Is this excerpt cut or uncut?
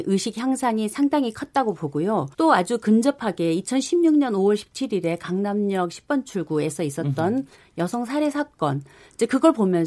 cut